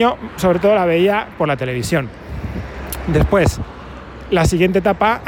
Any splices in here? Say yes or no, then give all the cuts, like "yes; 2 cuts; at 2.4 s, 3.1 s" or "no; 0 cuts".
no; 0 cuts